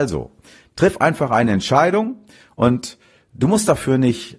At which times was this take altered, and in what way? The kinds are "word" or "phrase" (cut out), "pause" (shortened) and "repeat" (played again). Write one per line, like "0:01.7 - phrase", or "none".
none

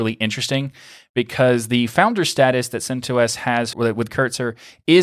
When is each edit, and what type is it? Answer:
0:03.7 - word
0:04.1 - word

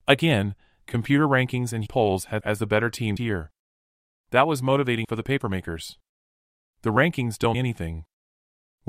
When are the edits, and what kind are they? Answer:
0:01.9 - word
0:02.4 - word
0:03.2 - word
0:05.0 - word
0:07.5 - word

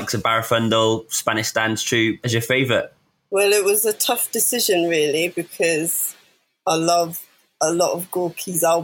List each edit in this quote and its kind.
none

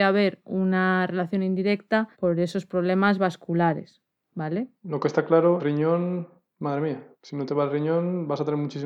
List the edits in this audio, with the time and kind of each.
0:02.1 - pause
0:04.8 - pause
0:05.6 - phrase
0:07.1 - pause

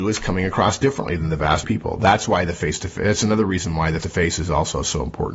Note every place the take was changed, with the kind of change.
0:01.6 - word
0:04.0 - word

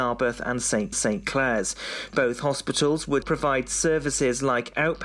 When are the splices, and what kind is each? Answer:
0:00.9 - repeat
0:03.2 - word

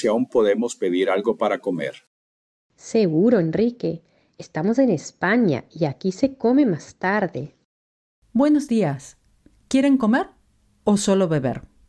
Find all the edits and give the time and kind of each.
none

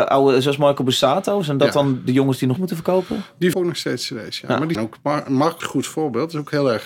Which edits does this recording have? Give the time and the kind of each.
0:02.6 - word
0:03.5 - word
0:04.7 - word
0:05.6 - word

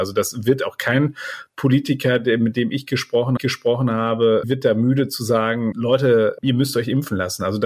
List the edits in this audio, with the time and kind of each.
0:03.4 - repeat
0:05.7 - word
0:06.4 - word

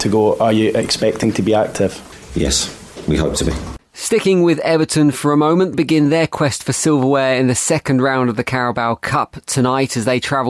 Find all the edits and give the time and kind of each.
0:05.7 - word

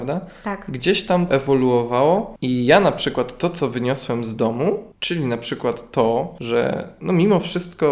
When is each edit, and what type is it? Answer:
0:01.3 - word

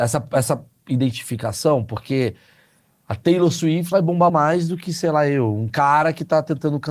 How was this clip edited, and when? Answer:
0:03.9 - word
0:04.3 - word

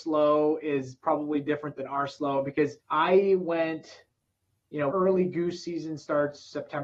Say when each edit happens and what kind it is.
0:02.8 - pause
0:04.9 - phrase

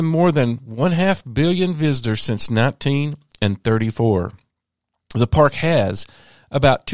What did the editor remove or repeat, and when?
none

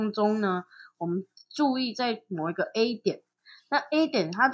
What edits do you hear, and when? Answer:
none

